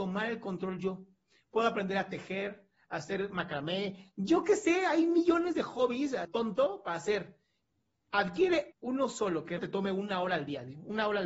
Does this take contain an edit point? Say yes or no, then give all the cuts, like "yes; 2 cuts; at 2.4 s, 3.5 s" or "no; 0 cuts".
yes; 3 cuts; at 6.2 s, 8.7 s, 9.6 s